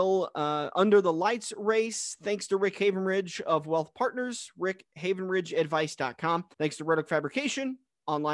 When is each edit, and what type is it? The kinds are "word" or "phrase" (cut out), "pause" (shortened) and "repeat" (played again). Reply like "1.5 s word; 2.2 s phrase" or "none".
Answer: none